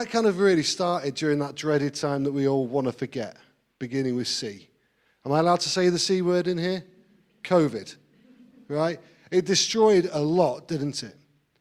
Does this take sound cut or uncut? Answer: uncut